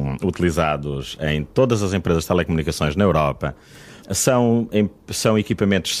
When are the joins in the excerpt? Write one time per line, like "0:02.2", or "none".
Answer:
0:04.0